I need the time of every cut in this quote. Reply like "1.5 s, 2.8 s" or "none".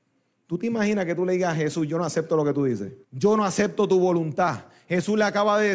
3.0 s